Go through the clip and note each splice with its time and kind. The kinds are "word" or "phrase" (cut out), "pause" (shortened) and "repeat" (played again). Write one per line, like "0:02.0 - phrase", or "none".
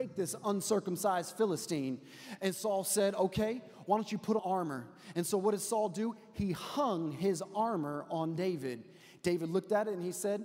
0:04.4 - phrase